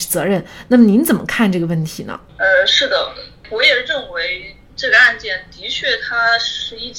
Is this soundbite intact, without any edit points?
no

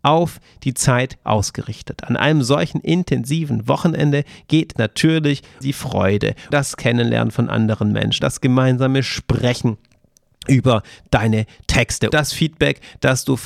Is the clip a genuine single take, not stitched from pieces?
no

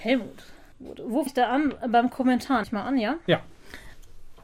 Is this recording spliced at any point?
yes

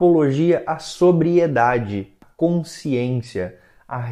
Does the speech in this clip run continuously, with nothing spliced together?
no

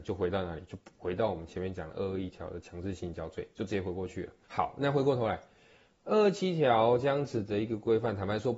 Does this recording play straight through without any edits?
no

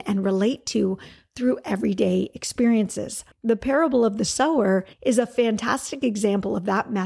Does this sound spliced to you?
yes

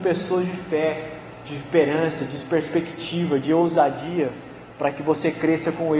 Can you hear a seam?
no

